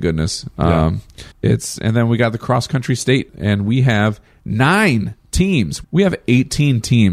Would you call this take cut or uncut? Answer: cut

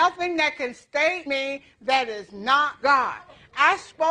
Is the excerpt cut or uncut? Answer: cut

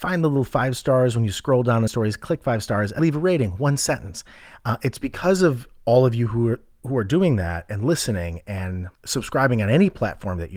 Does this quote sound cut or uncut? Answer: cut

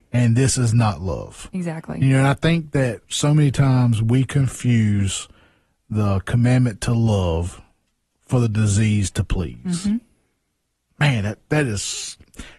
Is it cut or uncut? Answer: uncut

